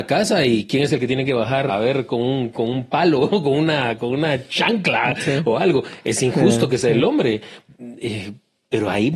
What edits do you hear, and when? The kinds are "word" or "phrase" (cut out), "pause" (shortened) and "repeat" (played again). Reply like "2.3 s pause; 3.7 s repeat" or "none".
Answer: 1.7 s word